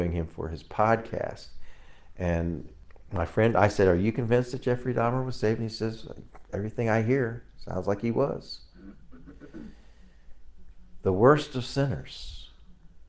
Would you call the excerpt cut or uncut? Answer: uncut